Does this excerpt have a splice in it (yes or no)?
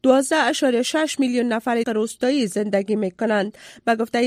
yes